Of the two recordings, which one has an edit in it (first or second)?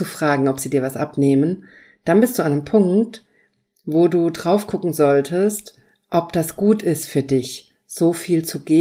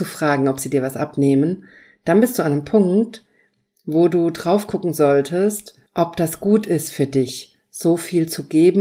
second